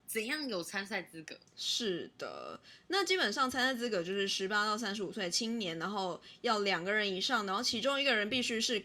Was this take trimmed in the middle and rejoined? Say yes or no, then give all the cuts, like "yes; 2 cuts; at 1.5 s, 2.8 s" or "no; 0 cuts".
yes; 1 cut; at 1.5 s